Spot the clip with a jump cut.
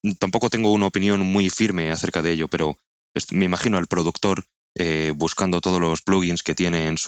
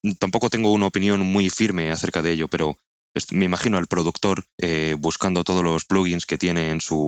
second; 1 cut; at 4.5 s

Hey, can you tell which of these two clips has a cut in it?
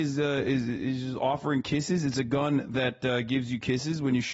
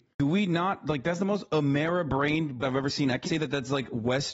second; 2 cuts; at 2.6 s, 3.2 s

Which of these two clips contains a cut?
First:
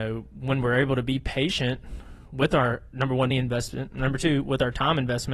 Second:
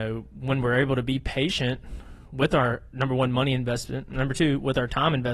first; 1 cut; at 3.3 s

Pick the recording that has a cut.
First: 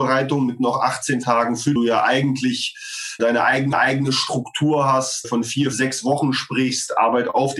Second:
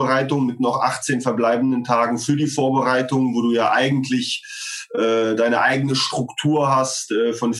first; 6 cuts; at 1.2 s, 1.8 s, 3.2 s, 3.7 s, 5.2 s, 5.7 s

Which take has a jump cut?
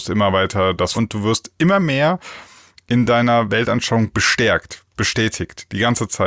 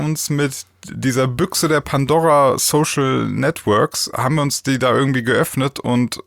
first; 1 cut; at 0.9 s

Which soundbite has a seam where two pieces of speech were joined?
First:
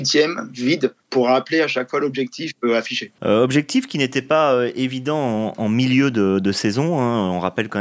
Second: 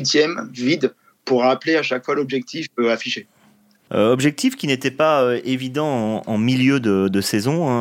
first; 2 cuts; at 1.0 s, 3.1 s

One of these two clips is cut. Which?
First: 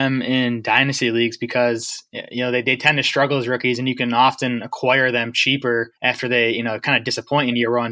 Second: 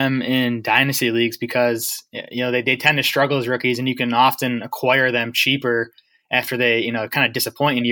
first; 1 cut; at 6.0 s

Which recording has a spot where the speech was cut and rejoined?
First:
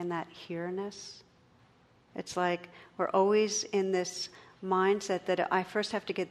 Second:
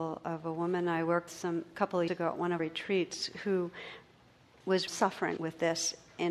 second; 5 cuts; at 1.3 s, 2.1 s, 2.6 s, 4.9 s, 5.4 s

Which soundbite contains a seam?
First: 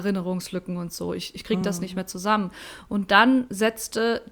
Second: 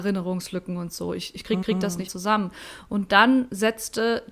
second; 2 cuts; at 1.6 s, 2.1 s

